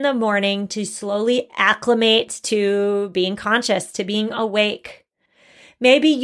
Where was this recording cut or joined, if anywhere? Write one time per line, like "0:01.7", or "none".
none